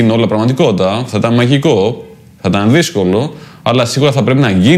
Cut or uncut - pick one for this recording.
uncut